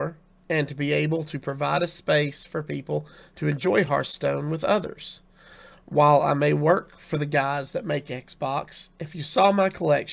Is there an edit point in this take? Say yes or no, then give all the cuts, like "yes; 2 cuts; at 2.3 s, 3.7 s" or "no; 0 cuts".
no; 0 cuts